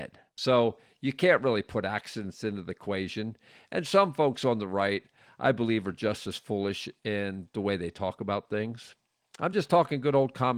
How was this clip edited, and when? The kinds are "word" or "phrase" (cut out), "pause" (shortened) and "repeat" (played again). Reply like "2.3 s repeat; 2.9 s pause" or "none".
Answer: none